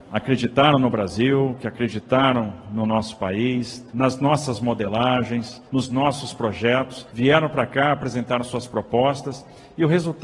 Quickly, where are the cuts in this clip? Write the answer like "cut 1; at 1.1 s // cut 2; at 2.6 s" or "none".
cut 1; at 3.9 s // cut 2; at 5.7 s // cut 3; at 7.1 s